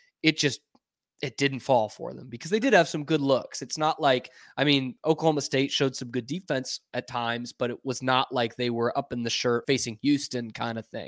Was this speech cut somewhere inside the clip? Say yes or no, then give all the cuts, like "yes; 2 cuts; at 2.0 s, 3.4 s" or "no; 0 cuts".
yes; 1 cut; at 9.6 s